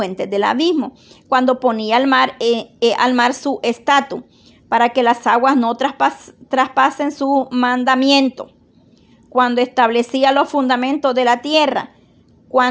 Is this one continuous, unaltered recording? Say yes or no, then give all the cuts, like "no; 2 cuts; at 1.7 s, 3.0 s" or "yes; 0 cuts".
yes; 0 cuts